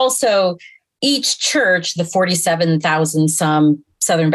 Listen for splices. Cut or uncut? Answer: uncut